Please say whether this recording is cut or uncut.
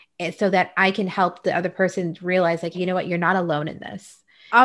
cut